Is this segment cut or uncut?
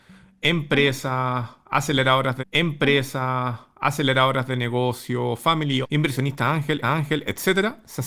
cut